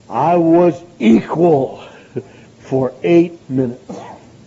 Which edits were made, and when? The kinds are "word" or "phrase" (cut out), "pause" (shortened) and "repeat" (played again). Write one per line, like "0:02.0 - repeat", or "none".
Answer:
0:02.5 - pause
0:03.4 - pause